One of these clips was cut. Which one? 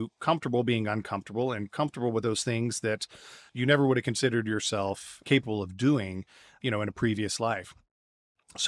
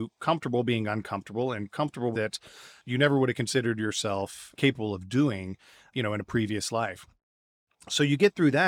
second; 1 cut; at 2.1 s

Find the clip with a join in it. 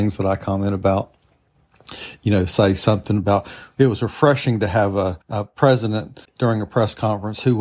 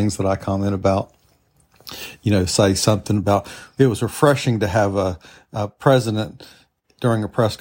first; 2 cuts; at 5.2 s, 6.2 s

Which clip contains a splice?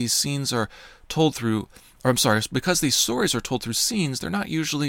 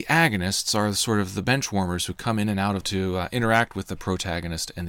second; 1 cut; at 2.8 s

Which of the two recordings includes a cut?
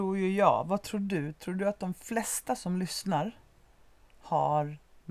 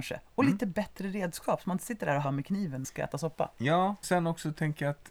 second; 3 cuts; at 2.2 s, 2.8 s, 4.0 s

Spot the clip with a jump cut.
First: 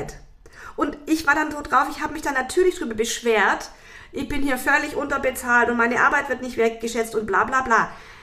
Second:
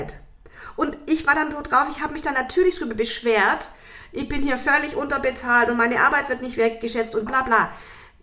second; 1 cut; at 7.3 s

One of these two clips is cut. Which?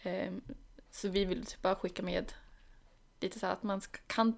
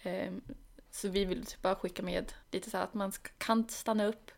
second; 1 cut; at 2.4 s

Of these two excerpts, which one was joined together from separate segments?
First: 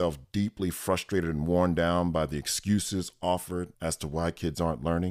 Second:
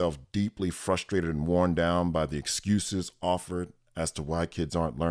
first; 1 cut; at 3.7 s

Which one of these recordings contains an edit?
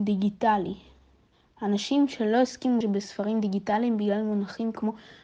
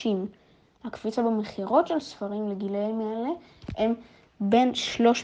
first; 1 cut; at 2.8 s

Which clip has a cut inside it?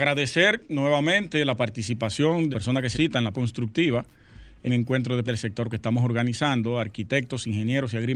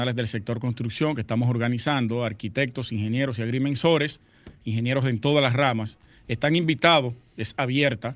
first; 6 cuts; at 2.5 s, 2.9 s, 3.3 s, 4.7 s, 5.2 s, 5.7 s

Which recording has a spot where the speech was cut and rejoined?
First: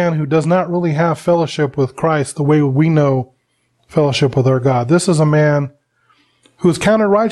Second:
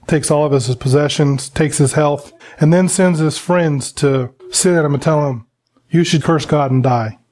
second; 3 cuts; at 2.4 s, 4.4 s, 6.2 s

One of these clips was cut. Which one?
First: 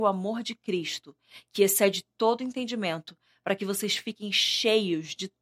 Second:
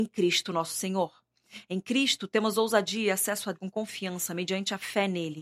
second; 1 cut; at 3.5 s

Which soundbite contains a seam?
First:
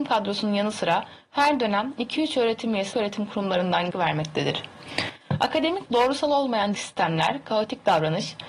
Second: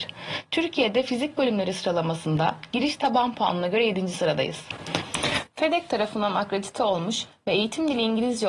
first; 4 cuts; at 2.9 s, 3.9 s, 5.9 s, 6.7 s

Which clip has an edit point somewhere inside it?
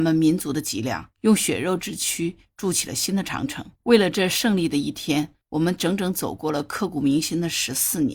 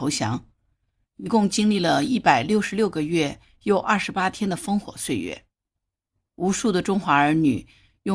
first; 3 cuts; at 1.1 s, 3.8 s, 5.4 s

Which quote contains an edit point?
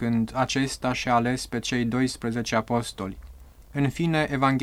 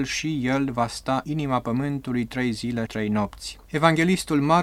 second; 3 cuts; at 1.2 s, 2.9 s, 3.6 s

